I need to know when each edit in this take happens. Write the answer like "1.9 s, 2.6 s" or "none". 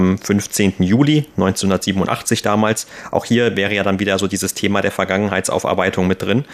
none